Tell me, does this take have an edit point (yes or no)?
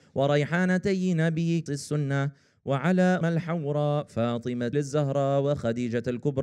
yes